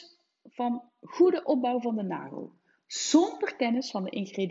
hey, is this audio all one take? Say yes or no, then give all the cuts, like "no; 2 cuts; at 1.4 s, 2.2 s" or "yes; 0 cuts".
yes; 0 cuts